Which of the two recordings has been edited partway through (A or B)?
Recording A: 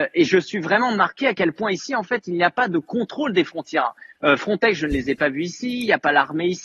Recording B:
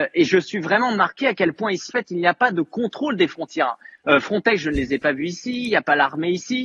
B